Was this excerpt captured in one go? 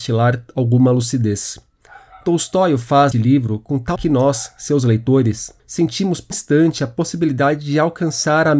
no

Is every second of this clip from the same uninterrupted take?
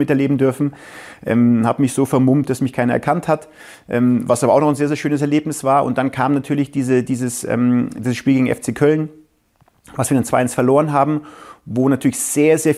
yes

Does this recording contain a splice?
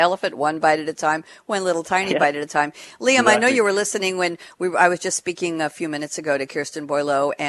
no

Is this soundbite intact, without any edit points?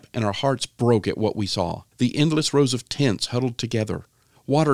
no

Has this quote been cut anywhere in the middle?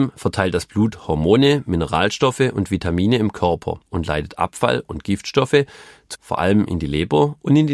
yes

